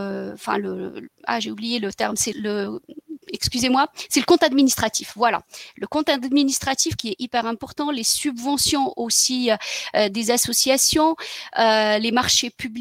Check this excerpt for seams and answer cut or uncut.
cut